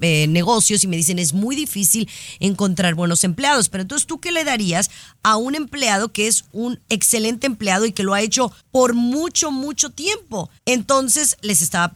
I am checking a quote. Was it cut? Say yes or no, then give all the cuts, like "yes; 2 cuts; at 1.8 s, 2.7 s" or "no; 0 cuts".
yes; 2 cuts; at 8.6 s, 10.6 s